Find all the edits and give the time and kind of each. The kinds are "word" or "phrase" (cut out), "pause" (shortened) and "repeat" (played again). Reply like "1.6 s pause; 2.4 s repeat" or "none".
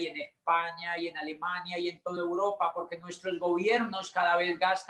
none